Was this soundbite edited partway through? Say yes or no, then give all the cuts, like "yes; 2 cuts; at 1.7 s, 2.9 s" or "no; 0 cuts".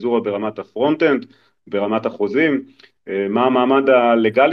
no; 0 cuts